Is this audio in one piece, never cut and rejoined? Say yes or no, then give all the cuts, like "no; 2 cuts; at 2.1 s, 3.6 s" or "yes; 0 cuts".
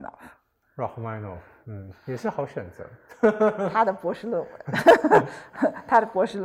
yes; 0 cuts